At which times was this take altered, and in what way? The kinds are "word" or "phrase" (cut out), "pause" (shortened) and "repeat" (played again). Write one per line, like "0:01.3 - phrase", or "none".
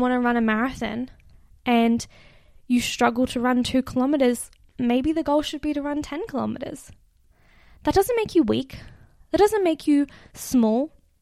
none